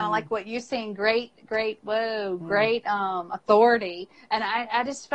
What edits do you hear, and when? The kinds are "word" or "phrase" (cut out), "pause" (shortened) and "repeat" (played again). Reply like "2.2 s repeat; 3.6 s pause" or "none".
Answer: none